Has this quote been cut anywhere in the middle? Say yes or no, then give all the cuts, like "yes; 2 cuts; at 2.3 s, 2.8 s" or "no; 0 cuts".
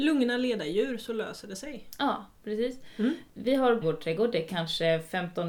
yes; 1 cut; at 3.8 s